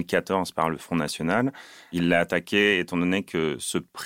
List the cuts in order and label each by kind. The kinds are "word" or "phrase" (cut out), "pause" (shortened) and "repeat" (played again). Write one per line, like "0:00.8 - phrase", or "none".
none